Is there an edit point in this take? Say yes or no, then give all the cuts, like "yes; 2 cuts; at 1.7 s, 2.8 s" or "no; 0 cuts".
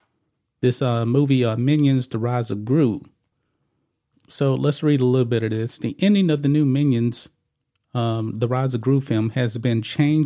no; 0 cuts